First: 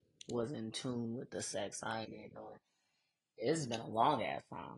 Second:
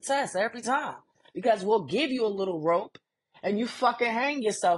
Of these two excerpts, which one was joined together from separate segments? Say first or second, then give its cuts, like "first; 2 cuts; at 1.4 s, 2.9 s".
first; 1 cut; at 2.0 s